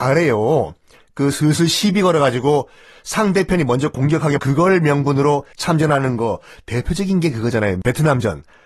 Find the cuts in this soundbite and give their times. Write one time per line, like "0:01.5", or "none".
0:04.4
0:05.5